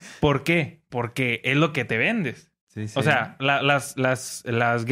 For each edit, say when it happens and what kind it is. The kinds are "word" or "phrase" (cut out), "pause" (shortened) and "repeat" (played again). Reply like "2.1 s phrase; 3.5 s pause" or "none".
2.6 s pause